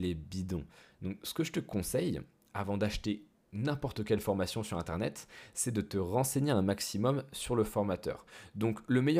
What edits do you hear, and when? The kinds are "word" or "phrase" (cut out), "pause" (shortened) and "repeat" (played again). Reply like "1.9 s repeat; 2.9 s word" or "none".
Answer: none